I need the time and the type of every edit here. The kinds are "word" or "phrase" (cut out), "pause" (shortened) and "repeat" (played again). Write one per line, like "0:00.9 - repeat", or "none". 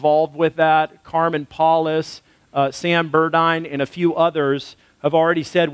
none